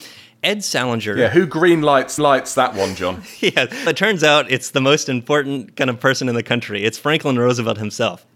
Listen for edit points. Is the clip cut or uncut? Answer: cut